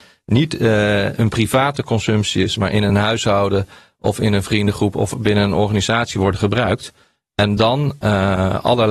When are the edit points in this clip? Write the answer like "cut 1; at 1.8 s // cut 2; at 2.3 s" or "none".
none